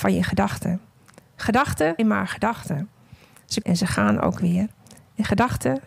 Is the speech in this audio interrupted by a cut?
yes; 2 cuts; at 2.0 s, 3.6 s

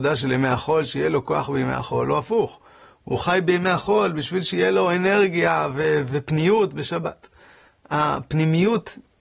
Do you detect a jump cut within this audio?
no; 0 cuts

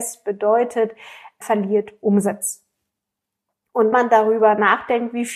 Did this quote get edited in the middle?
yes; 2 cuts; at 1.4 s, 3.9 s

